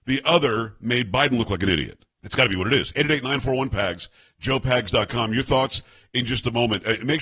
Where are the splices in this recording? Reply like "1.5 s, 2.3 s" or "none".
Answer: 2.1 s